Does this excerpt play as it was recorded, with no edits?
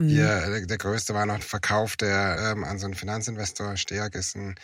no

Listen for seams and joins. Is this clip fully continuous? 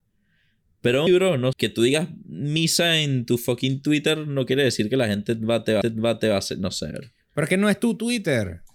no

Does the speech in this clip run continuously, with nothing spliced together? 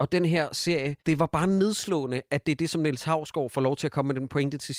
no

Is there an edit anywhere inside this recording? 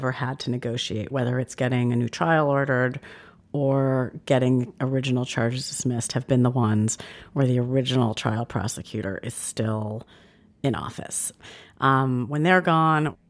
no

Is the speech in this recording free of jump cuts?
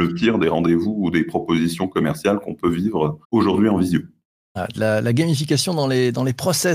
no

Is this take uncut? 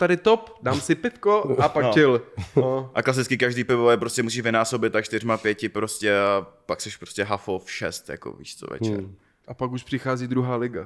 yes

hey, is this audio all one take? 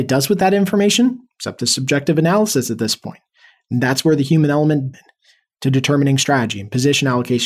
no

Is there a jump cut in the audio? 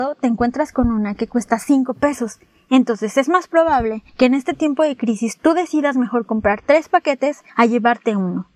no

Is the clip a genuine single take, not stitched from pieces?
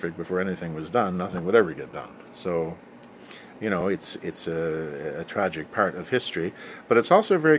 yes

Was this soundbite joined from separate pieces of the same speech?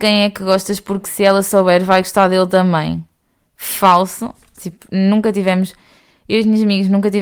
no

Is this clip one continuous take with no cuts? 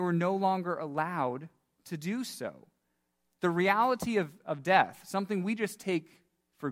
yes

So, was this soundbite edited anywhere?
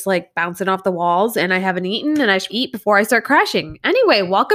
yes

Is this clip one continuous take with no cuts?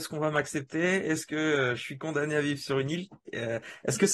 no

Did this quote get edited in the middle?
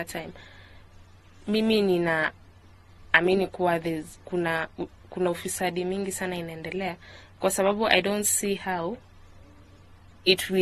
no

